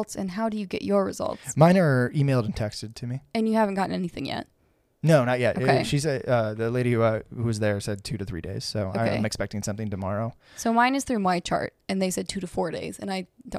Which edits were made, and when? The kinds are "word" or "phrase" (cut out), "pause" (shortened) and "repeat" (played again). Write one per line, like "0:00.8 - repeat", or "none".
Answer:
none